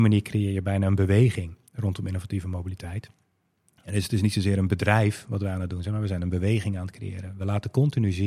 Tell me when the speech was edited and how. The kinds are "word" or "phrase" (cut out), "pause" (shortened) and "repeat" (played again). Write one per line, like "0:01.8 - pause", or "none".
none

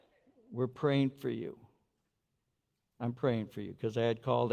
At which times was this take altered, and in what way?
none

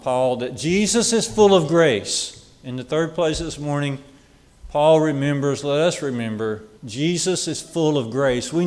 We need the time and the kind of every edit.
0:06.8 - pause

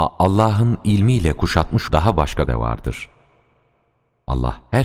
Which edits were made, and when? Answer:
0:01.9 - word
0:02.5 - word

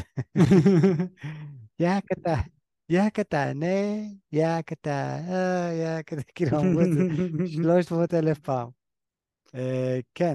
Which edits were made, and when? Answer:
none

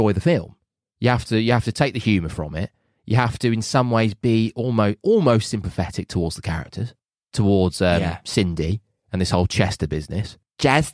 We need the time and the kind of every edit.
none

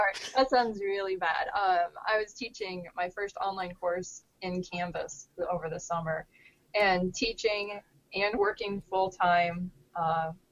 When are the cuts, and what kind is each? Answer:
0:04.4 - word

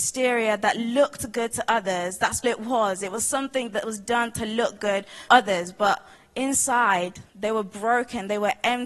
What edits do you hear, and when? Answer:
0:02.4 - word
0:05.3 - word
0:07.3 - pause

